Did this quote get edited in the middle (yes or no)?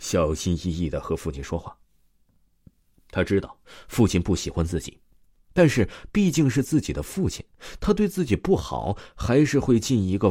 no